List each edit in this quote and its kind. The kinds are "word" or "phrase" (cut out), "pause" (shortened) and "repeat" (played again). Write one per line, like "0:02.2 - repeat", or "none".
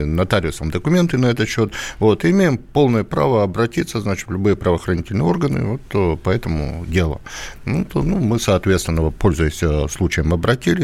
none